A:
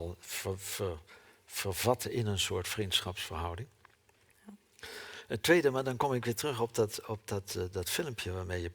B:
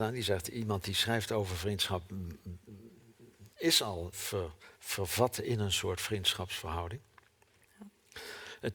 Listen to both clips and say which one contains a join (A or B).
B